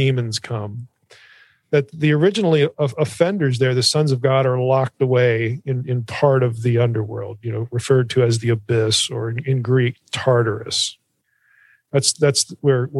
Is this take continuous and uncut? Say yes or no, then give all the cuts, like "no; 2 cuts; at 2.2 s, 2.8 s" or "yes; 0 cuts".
yes; 0 cuts